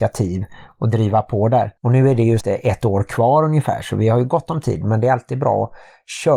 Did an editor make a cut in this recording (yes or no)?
yes